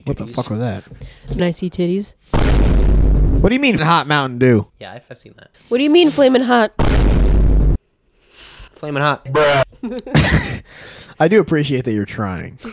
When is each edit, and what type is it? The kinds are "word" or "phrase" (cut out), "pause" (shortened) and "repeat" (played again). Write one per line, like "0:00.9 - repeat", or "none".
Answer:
0:01.4 - word
0:03.8 - word
0:04.7 - pause
0:05.1 - word
0:05.5 - pause
0:08.7 - pause